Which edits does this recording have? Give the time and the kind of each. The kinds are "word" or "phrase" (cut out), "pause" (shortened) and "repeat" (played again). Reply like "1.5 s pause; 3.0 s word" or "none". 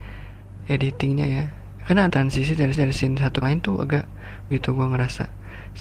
2.1 s phrase; 2.7 s repeat; 3.4 s phrase; 4.5 s word